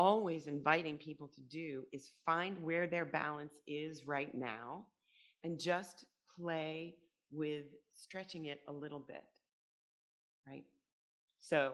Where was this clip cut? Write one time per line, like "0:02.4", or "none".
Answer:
none